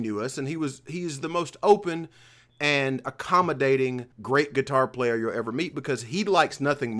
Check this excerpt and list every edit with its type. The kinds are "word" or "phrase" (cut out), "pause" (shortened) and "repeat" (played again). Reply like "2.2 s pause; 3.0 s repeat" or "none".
4.1 s pause